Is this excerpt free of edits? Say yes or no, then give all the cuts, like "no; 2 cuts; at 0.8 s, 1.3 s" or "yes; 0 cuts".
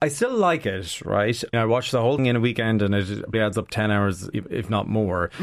no; 5 cuts; at 1.5 s, 2.2 s, 3.3 s, 3.7 s, 4.3 s